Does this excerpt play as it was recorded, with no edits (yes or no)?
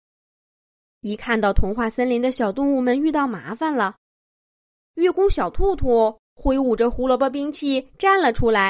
yes